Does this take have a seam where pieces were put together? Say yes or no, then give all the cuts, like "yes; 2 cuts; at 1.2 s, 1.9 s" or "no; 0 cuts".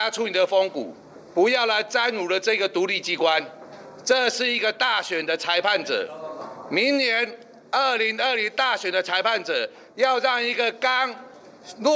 no; 0 cuts